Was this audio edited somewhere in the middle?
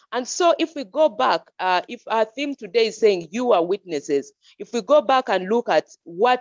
no; 0 cuts

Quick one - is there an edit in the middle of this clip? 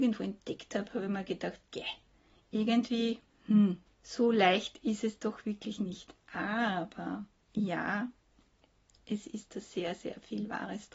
no; 0 cuts

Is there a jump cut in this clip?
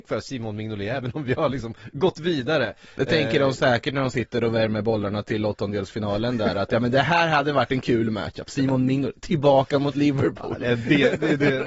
no; 0 cuts

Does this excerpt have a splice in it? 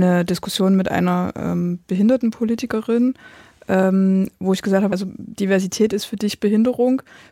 yes; 1 cut; at 4.9 s

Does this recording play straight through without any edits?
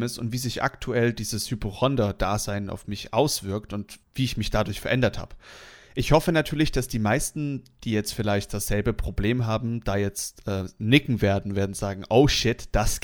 no; 1 cut; at 4.0 s

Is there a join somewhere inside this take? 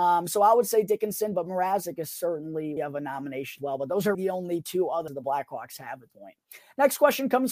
yes; 5 cuts; at 2.8 s, 3.6 s, 4.1 s, 5.1 s, 6.1 s

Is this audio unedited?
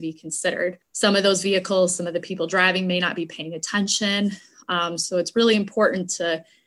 yes; 0 cuts

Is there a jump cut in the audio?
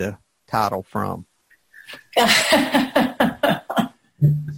yes; 1 cut; at 1.5 s

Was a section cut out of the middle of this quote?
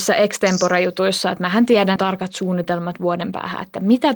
yes; 1 cut; at 2.0 s

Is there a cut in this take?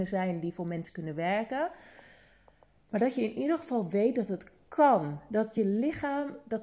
no; 0 cuts

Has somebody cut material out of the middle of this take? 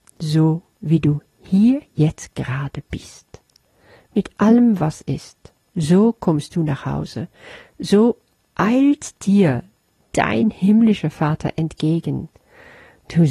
no; 0 cuts

